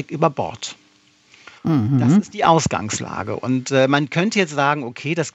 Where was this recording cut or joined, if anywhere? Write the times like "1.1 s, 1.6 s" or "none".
1.6 s